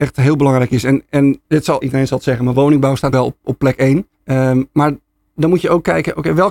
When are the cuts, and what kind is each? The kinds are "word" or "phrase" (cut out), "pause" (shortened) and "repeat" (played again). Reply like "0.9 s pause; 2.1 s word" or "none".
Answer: 1.4 s pause; 1.8 s word; 3.1 s word; 4.1 s pause